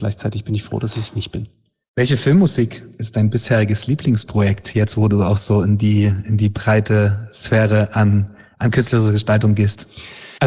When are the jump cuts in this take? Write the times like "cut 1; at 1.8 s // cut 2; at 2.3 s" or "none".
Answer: none